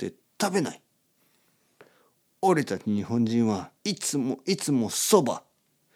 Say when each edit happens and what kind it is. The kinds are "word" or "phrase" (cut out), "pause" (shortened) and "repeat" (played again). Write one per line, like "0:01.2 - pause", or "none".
0:03.8 - pause